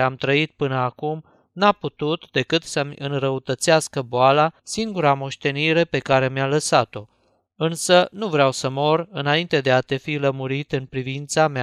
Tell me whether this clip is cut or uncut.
cut